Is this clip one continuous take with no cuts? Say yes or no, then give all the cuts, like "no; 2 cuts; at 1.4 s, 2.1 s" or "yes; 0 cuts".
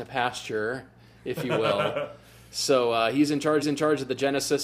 no; 1 cut; at 3.6 s